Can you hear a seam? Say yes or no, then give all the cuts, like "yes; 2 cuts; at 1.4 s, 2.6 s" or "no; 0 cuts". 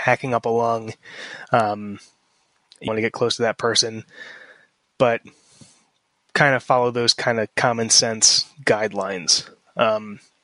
yes; 1 cut; at 2.9 s